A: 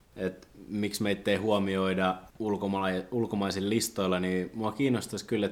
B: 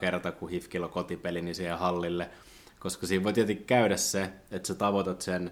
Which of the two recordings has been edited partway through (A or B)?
A